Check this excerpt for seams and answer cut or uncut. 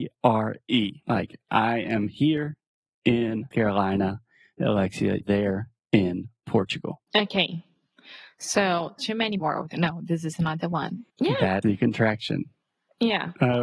cut